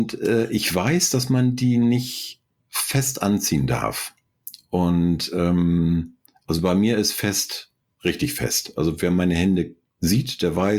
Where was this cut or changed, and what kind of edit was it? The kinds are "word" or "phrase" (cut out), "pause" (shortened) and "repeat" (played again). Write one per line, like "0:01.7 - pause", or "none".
none